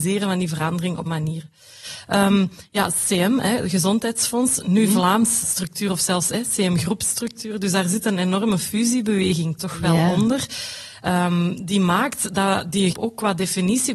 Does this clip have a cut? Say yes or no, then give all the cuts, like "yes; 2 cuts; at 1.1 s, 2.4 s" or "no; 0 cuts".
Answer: yes; 3 cuts; at 1.1 s, 5.4 s, 12.9 s